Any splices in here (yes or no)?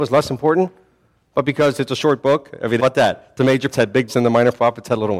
yes